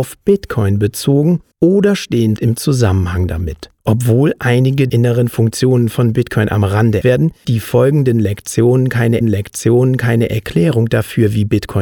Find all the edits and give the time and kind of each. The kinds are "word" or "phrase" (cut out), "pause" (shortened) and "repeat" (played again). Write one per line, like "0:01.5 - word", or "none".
0:01.5 - pause
0:02.4 - word
0:03.8 - pause
0:04.9 - word
0:07.0 - word
0:07.4 - word
0:09.2 - repeat